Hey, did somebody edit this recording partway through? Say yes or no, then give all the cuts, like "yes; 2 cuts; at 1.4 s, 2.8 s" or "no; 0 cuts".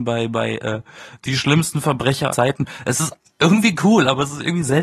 yes; 1 cut; at 2.3 s